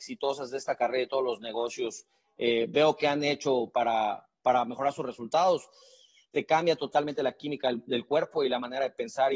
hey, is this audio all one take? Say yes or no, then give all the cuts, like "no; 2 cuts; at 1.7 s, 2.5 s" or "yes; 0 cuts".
yes; 0 cuts